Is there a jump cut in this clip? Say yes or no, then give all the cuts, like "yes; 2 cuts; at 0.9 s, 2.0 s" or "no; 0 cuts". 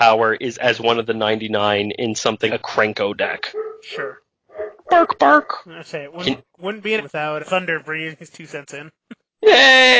yes; 4 cuts; at 2.5 s, 4.8 s, 7.0 s, 7.4 s